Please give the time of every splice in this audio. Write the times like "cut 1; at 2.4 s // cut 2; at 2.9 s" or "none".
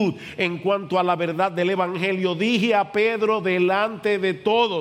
none